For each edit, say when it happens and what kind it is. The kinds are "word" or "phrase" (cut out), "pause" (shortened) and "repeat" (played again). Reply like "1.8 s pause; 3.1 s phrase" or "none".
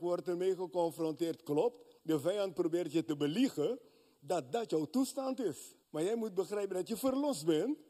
2.0 s pause; 5.8 s pause